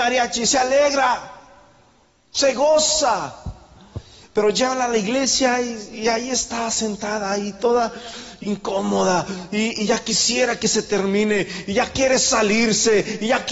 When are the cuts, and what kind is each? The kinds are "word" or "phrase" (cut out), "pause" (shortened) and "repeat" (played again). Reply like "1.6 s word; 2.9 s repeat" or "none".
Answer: none